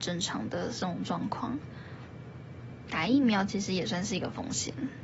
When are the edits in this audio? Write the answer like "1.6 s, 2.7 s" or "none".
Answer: 2.9 s